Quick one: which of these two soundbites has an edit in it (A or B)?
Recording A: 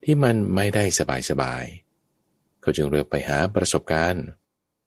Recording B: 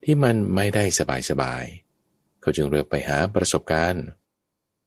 B